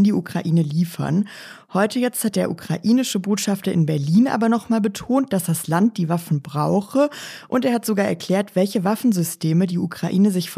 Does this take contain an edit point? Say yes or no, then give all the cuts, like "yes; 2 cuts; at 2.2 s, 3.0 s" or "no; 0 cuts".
no; 0 cuts